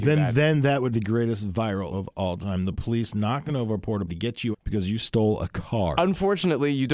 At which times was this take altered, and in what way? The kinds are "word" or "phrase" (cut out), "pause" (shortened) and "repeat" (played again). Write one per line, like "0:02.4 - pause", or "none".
0:00.9 - word
0:01.9 - word
0:04.1 - word
0:04.5 - word